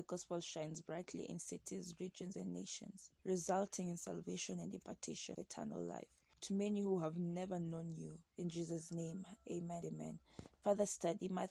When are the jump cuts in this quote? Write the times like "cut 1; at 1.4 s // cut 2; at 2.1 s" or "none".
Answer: cut 1; at 3.2 s // cut 2; at 5.3 s // cut 3; at 6.3 s // cut 4; at 8.3 s // cut 5; at 9.8 s